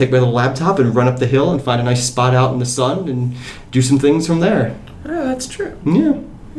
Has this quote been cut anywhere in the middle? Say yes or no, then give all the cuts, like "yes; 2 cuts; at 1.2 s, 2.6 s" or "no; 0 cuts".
no; 0 cuts